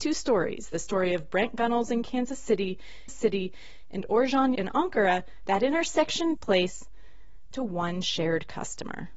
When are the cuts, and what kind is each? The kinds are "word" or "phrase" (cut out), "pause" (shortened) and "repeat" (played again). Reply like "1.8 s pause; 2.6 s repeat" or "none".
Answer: 3.1 s repeat; 4.6 s word; 6.4 s word; 7.5 s word